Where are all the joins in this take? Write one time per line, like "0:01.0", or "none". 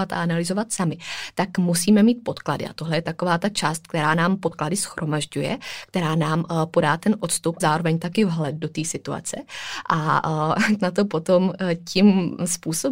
0:07.6
0:10.8

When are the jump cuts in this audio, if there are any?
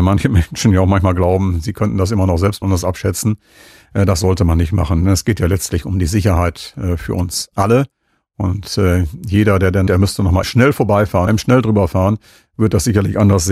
0:02.6
0:09.9
0:10.4
0:11.3

